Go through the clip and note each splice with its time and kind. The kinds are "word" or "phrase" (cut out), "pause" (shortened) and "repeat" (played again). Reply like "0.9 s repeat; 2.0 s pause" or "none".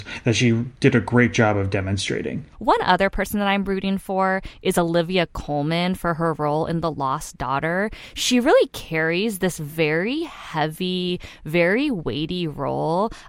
2.5 s pause